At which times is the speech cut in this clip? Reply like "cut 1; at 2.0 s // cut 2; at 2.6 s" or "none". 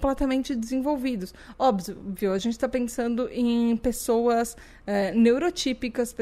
none